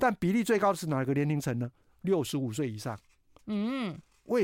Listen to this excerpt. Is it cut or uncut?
uncut